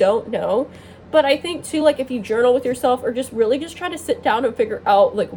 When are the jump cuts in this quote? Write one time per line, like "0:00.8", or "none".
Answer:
none